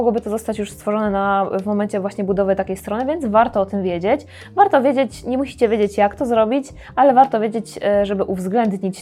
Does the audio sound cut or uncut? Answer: uncut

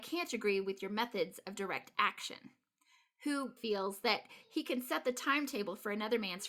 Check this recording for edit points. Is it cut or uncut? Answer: cut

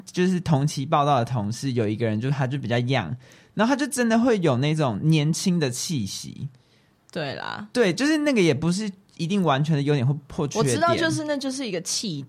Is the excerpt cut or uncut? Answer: uncut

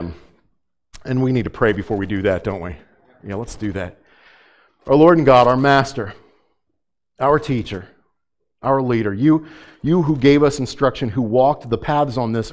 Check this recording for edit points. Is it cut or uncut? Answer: uncut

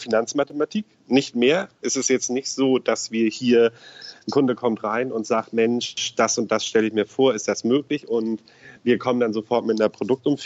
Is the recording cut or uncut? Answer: uncut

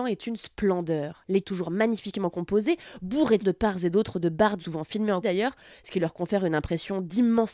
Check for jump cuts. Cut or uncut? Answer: cut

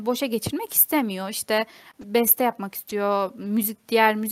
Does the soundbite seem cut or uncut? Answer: uncut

